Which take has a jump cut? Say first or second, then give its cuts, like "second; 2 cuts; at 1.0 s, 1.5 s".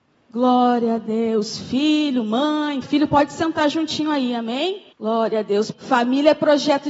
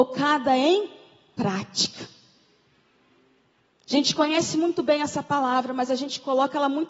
first; 3 cuts; at 2.8 s, 4.9 s, 5.7 s